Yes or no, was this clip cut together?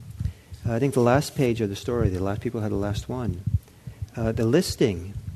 no